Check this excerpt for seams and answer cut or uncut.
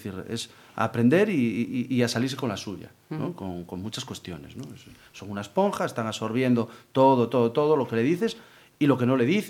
uncut